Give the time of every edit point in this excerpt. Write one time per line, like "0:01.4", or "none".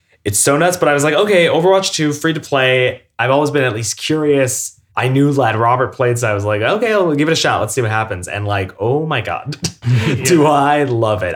0:04.9